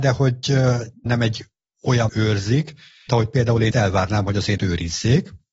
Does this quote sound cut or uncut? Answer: cut